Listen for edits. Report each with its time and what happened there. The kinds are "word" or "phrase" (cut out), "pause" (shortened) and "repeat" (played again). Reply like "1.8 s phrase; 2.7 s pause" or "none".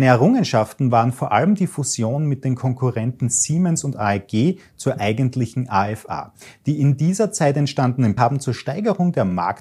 8.2 s word